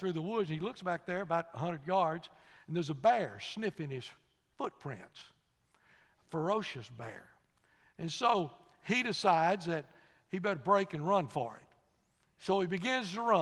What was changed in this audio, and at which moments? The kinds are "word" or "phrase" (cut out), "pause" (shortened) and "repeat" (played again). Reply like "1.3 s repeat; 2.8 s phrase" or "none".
none

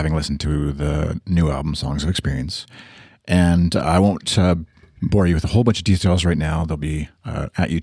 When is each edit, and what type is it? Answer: none

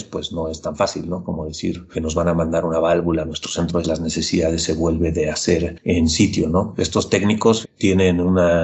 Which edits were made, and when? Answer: 1.9 s word; 3.8 s phrase; 7.6 s word

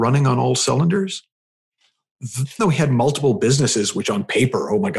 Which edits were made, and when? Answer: 2.6 s word

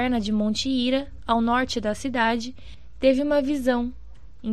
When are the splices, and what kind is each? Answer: none

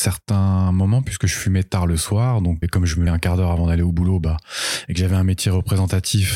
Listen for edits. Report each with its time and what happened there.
2.6 s word; 3.1 s word

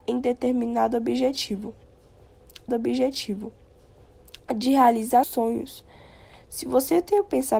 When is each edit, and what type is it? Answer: 2.7 s repeat; 5.2 s word

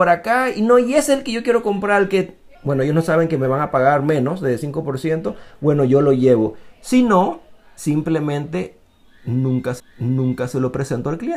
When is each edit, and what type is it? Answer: 2.5 s pause; 9.8 s repeat

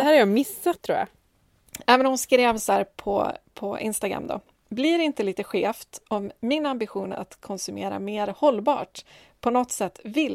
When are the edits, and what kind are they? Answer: none

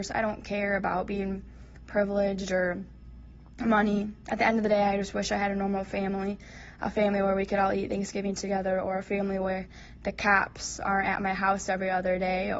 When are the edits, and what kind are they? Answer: none

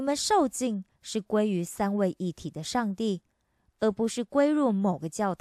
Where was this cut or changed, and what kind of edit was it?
none

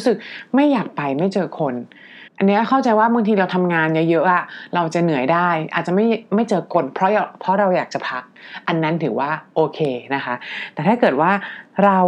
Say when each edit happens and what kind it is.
2.3 s pause

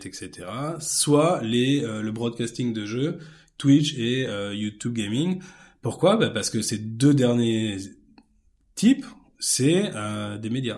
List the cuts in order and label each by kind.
none

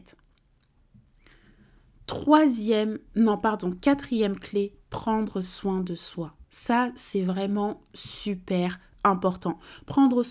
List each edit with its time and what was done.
6.4 s pause

